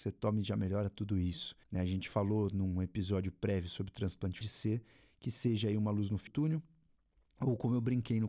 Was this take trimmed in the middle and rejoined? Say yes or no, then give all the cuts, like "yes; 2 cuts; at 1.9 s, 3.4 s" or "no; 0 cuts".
yes; 3 cuts; at 1.6 s, 4.4 s, 6.3 s